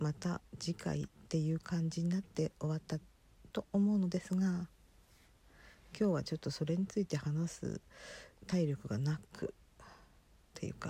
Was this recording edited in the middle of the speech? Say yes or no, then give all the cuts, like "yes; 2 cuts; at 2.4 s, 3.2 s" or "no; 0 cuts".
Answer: yes; 1 cut; at 8.3 s